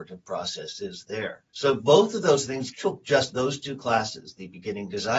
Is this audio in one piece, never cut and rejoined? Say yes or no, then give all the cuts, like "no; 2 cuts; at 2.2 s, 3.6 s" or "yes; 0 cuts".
no; 2 cuts; at 1.5 s, 2.7 s